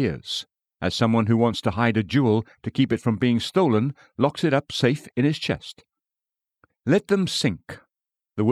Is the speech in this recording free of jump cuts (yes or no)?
yes